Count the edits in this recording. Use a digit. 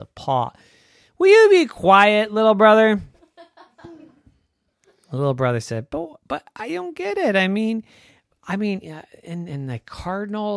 0